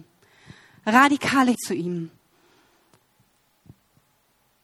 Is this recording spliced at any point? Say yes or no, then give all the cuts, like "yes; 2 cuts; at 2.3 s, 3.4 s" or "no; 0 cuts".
yes; 1 cut; at 1.5 s